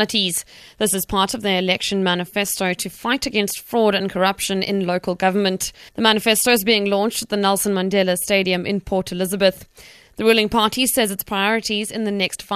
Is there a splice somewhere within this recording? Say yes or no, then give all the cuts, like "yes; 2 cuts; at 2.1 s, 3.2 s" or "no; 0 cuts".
yes; 1 cut; at 5.9 s